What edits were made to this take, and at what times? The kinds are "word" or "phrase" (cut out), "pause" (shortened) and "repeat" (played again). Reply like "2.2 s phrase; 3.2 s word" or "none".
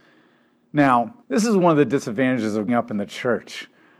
1.2 s pause; 2.7 s word

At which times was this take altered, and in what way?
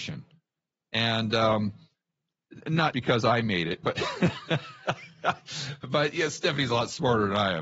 2.9 s word

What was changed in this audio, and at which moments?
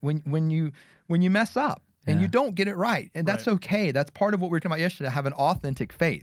4.6 s word

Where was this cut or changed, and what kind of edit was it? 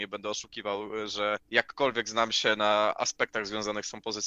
1.4 s pause

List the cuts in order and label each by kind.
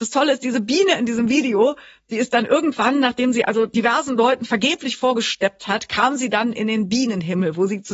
none

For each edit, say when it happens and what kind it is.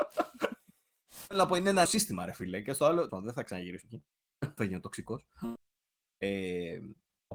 1.9 s word; 3.1 s word; 3.8 s word; 4.6 s word

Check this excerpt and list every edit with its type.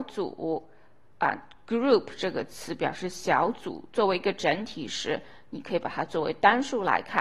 none

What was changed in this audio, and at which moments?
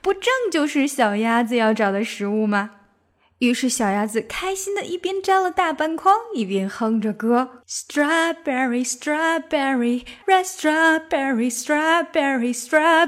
7.6 s pause; 10.2 s word

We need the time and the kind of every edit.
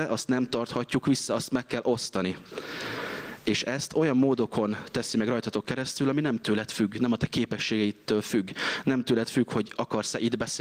none

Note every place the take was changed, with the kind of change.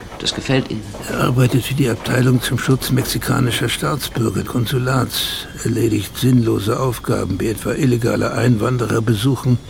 4.4 s word

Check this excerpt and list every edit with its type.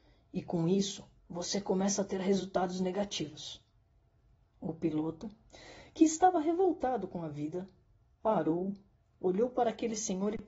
none

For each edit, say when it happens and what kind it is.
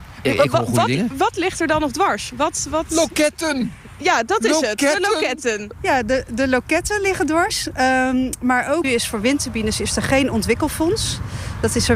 8.8 s phrase

